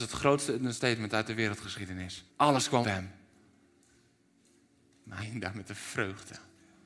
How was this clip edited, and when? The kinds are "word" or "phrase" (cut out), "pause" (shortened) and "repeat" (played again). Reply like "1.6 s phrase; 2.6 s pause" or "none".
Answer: 2.3 s pause; 2.8 s word; 5.2 s word

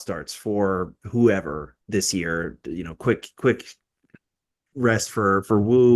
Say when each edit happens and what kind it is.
1.8 s pause

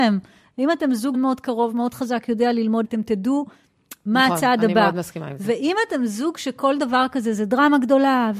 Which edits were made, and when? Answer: 1.1 s word; 2.8 s word

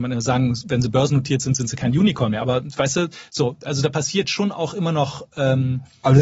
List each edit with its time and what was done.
none

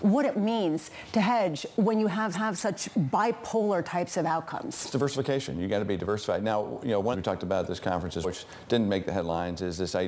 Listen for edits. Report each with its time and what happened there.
2.3 s repeat; 7.1 s phrase; 8.2 s word

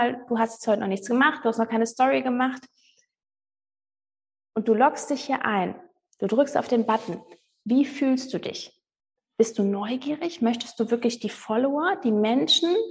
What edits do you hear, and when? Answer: none

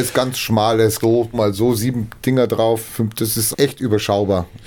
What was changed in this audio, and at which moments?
1.0 s phrase; 1.3 s word; 3.5 s phrase

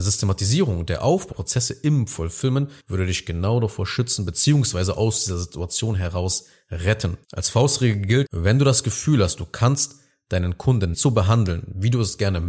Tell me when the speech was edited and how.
1.3 s word; 2.8 s pause; 7.2 s pause; 8.2 s word; 10.9 s word

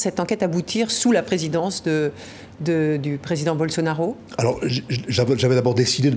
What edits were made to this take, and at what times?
none

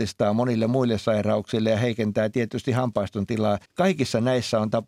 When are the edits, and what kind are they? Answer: 3.6 s pause

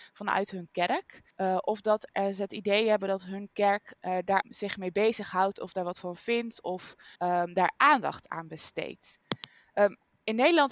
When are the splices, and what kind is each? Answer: 1.3 s pause; 3.9 s word; 4.4 s word; 7.2 s pause

